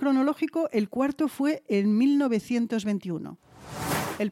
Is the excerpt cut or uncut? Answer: uncut